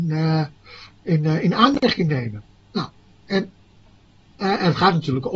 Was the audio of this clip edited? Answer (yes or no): no